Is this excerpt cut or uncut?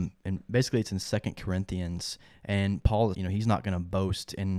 cut